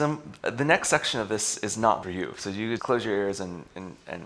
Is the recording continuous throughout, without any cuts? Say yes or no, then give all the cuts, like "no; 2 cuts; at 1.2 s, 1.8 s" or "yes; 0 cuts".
no; 2 cuts; at 2.0 s, 2.8 s